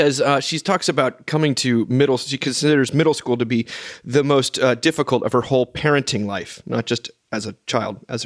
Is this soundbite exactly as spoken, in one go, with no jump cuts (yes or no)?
yes